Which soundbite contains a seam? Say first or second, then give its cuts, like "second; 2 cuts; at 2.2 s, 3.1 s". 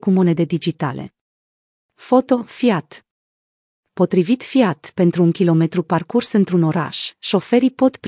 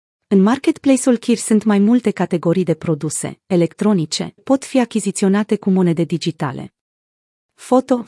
second; 1 cut; at 4.4 s